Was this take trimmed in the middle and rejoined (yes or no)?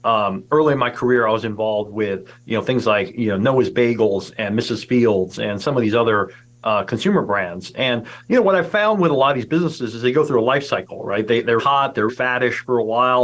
yes